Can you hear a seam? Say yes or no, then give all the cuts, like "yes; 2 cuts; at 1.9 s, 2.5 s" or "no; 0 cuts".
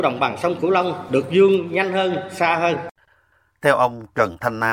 no; 0 cuts